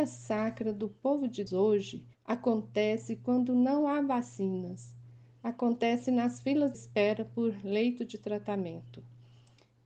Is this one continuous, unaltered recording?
no; 3 cuts; at 1.5 s, 2.1 s, 6.7 s

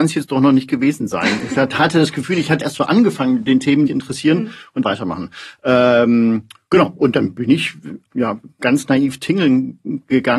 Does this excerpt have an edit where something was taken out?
yes; 4 cuts; at 2.6 s, 3.9 s, 4.8 s, 8.1 s

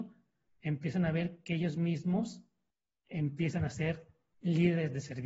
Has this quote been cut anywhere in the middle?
no; 0 cuts

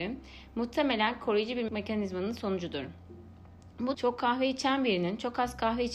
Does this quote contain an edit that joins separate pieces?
yes; 2 cuts; at 1.7 s, 3.9 s

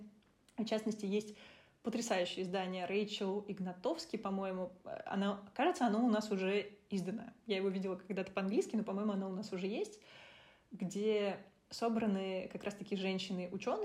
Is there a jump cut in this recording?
no; 0 cuts

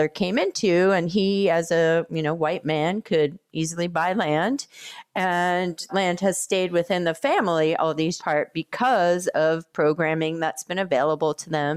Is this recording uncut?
no; 2 cuts; at 5.9 s, 8.2 s

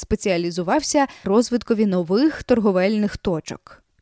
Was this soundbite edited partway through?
yes; 1 cut; at 1.2 s

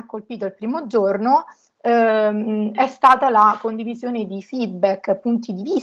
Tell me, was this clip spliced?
no; 0 cuts

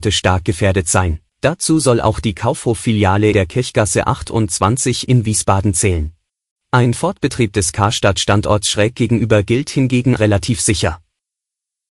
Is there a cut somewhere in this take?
yes; 4 cuts; at 1.3 s, 3.3 s, 6.3 s, 10.2 s

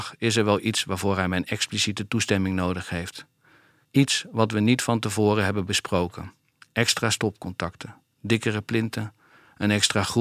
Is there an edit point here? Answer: no; 0 cuts

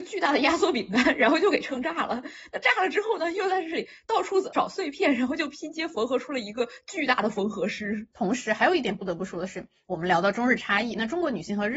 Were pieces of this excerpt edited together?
yes; 1 cut; at 8.1 s

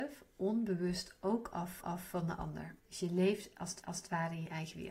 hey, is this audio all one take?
no; 3 cuts; at 1.8 s, 2.8 s, 3.8 s

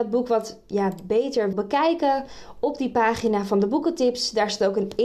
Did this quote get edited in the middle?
yes; 1 cut; at 1.5 s

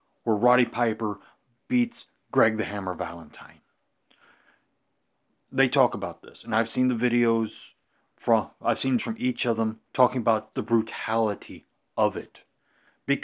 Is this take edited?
yes; 3 cuts; at 9.0 s, 9.9 s, 10.5 s

